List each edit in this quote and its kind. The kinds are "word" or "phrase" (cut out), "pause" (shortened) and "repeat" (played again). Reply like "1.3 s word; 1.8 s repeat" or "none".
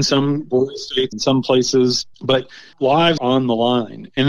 1.1 s word; 2.1 s pause; 3.2 s word